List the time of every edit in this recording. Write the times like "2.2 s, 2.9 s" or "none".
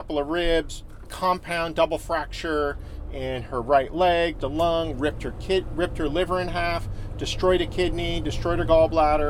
1.1 s, 4.4 s